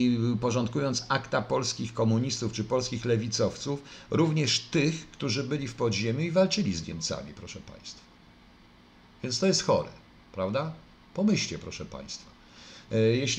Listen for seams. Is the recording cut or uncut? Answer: uncut